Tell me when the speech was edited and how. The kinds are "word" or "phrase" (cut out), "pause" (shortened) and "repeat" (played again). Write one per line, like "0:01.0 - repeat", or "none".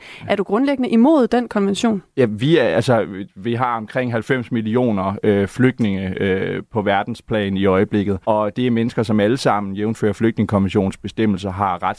0:02.1 - pause
0:08.2 - pause